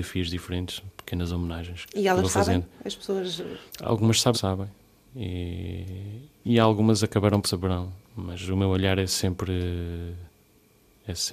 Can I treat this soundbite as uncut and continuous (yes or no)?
no